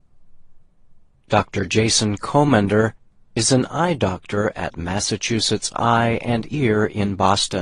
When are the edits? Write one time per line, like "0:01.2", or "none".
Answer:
none